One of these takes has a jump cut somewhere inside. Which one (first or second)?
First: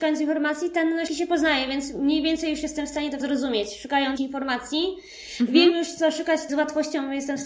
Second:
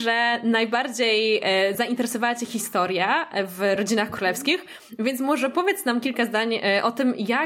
first